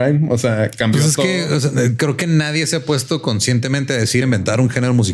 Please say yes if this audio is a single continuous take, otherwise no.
no